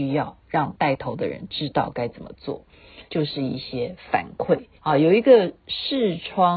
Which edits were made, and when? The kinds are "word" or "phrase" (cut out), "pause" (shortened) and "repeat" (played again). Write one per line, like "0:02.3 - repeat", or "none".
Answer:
0:03.1 - pause
0:04.8 - pause